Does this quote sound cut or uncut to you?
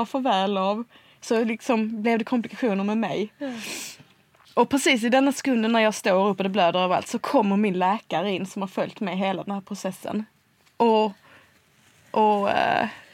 uncut